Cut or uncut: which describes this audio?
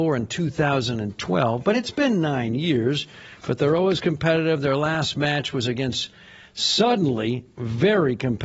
uncut